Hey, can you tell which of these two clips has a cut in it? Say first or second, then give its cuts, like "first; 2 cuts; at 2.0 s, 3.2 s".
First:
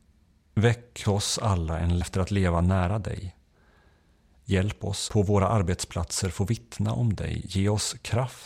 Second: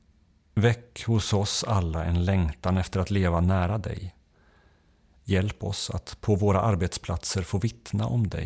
first; 3 cuts; at 1.0 s, 2.0 s, 5.1 s